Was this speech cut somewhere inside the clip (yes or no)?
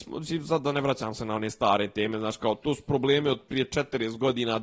no